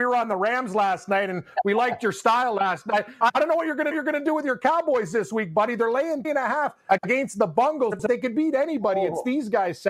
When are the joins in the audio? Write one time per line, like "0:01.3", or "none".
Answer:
0:03.9
0:06.2